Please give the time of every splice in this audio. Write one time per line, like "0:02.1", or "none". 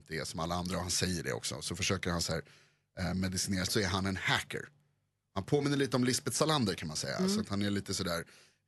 0:03.7